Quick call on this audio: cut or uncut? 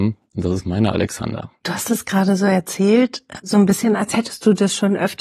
cut